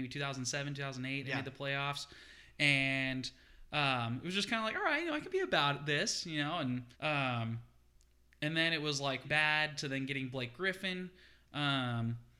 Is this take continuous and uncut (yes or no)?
no